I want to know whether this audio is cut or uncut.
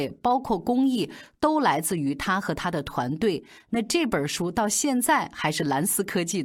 uncut